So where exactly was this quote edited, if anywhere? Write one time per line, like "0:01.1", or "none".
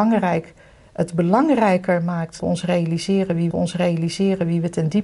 0:02.4
0:03.5

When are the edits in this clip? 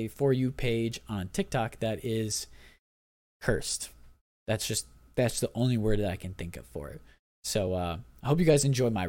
none

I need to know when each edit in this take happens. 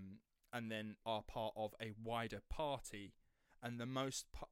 0:01.0

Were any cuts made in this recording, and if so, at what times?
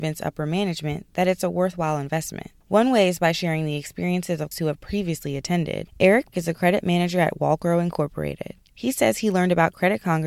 0:04.5
0:06.3

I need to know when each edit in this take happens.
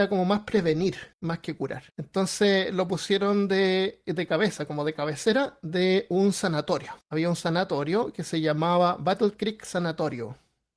0:01.1
0:01.9
0:07.0

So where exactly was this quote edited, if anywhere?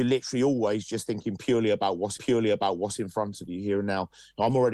0:02.2

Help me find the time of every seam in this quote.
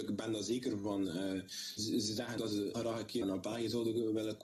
0:01.8
0:02.4
0:02.7
0:03.2

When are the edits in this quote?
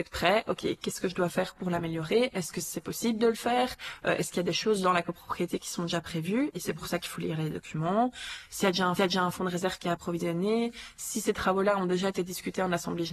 0:09.0

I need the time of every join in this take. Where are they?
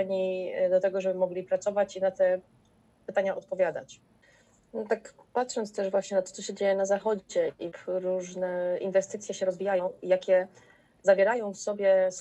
none

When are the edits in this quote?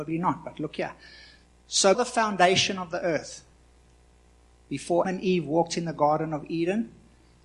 0:01.9
0:05.0

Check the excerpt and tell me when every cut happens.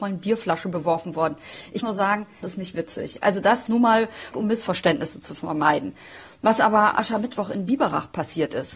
0:01.8
0:02.4
0:03.7
0:04.3
0:06.9

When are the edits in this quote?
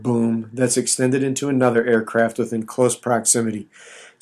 none

